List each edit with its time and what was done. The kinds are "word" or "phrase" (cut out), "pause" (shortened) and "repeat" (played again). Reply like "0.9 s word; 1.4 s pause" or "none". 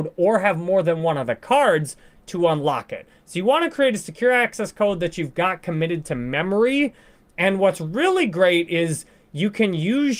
none